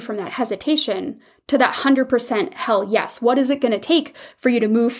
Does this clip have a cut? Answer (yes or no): no